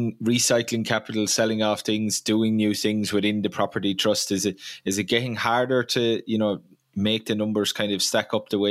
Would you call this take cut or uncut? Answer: uncut